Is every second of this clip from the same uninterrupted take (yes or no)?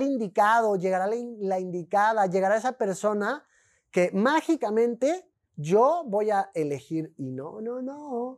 yes